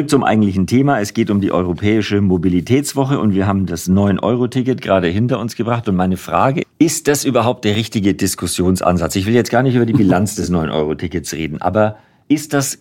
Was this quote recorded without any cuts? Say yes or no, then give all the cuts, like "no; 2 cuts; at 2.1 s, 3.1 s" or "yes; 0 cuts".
no; 1 cut; at 6.6 s